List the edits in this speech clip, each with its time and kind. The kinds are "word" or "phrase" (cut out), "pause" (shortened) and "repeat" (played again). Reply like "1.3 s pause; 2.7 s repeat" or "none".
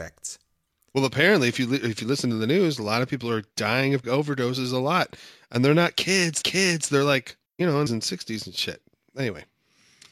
4.0 s word; 6.4 s repeat; 7.5 s pause; 7.9 s phrase